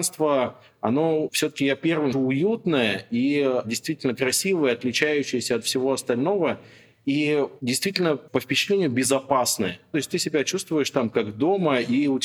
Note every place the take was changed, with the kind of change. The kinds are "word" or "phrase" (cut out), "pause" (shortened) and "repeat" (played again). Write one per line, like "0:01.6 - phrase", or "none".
0:01.3 - word
0:02.1 - word
0:08.3 - word